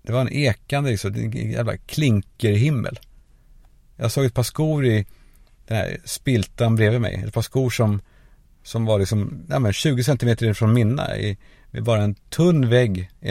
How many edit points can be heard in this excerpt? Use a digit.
0